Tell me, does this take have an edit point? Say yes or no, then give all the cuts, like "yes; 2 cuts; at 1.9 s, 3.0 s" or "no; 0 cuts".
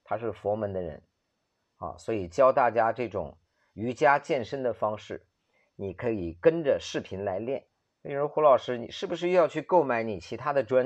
yes; 1 cut; at 7.8 s